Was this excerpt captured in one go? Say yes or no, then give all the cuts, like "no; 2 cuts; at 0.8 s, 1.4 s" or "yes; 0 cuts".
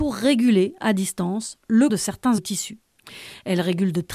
no; 2 cuts; at 1.9 s, 2.4 s